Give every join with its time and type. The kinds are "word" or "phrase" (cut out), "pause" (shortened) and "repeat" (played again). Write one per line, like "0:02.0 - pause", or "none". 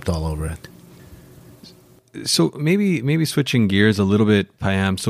none